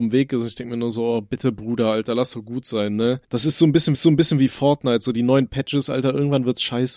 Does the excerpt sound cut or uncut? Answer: cut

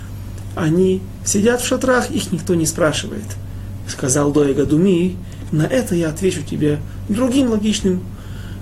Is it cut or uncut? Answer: uncut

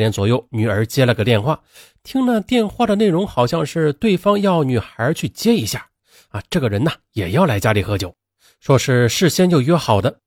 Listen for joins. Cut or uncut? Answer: uncut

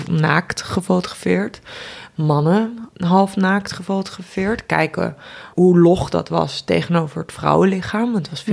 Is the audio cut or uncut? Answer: cut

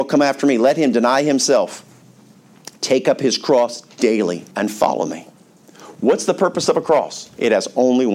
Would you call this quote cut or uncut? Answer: cut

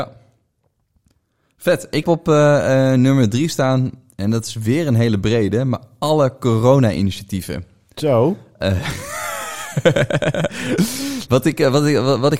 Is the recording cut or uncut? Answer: cut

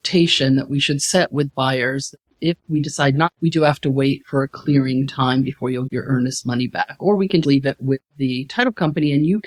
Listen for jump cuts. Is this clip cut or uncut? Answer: cut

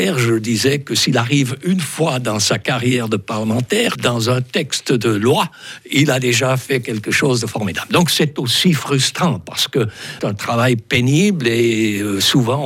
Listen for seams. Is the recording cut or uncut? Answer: cut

